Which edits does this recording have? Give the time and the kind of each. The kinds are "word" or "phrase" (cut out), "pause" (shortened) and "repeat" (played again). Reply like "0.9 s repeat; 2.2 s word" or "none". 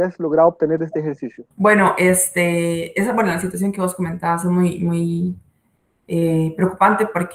1.5 s pause